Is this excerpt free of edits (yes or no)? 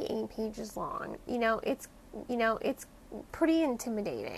no